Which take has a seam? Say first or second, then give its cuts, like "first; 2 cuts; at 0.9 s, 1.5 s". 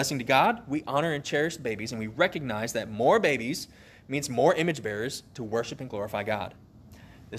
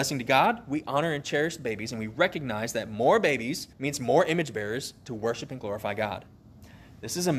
second; 1 cut; at 3.7 s